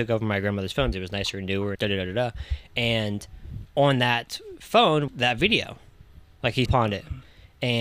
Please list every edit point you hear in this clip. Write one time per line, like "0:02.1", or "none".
0:00.9
0:01.8
0:03.6
0:05.1
0:06.7